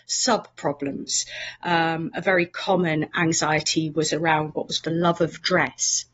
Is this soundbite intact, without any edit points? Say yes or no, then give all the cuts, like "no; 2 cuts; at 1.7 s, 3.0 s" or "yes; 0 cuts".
no; 1 cut; at 4.8 s